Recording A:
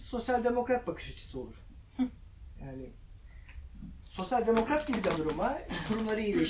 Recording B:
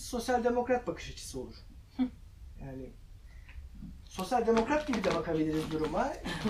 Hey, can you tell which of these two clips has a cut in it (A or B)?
A